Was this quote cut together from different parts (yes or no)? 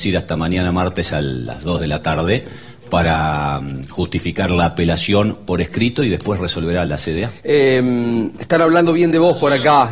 yes